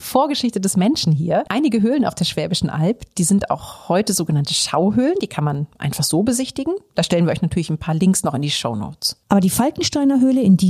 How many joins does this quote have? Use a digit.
0